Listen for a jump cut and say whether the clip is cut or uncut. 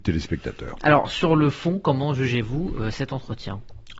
uncut